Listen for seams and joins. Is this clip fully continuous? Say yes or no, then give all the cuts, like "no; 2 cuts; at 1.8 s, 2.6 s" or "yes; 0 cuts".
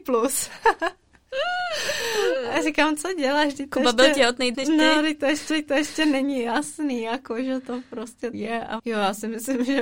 no; 4 cuts; at 4.5 s, 5.5 s, 8.3 s, 8.8 s